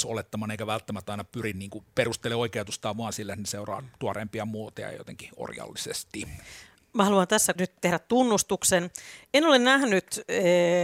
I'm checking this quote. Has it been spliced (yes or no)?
yes